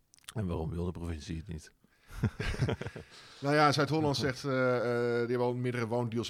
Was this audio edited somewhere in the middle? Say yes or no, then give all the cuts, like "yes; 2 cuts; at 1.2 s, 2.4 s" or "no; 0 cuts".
no; 0 cuts